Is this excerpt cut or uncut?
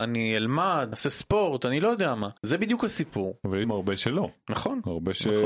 cut